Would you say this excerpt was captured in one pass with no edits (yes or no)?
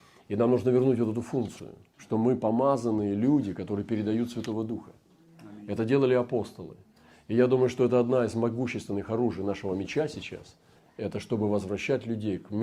yes